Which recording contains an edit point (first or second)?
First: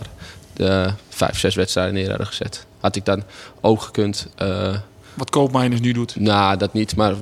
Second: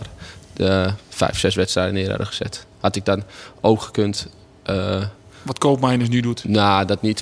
first